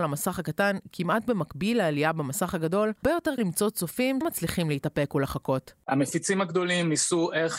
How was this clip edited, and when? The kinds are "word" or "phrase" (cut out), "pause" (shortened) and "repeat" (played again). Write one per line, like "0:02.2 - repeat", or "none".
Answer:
0:03.0 - word
0:03.4 - word
0:04.2 - word